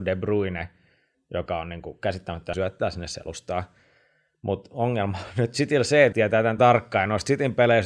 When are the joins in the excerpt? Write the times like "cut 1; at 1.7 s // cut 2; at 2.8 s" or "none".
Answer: cut 1; at 2.5 s // cut 2; at 6.1 s // cut 3; at 6.6 s